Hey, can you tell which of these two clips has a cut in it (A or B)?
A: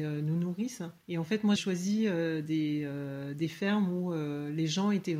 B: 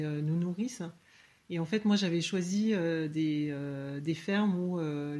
A